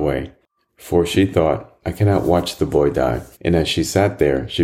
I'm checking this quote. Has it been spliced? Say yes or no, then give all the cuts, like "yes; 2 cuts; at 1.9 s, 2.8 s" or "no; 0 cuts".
yes; 1 cut; at 3.3 s